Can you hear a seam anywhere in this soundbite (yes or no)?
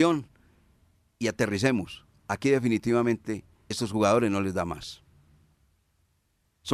yes